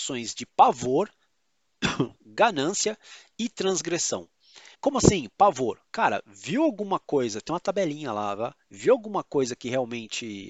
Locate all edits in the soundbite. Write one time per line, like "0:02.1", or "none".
0:04.7